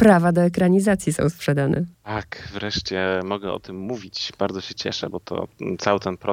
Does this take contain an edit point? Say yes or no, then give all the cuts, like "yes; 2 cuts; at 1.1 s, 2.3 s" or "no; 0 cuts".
yes; 2 cuts; at 1.9 s, 5.1 s